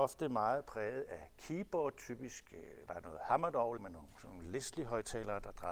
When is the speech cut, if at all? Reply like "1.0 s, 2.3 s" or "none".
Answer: 2.9 s, 3.8 s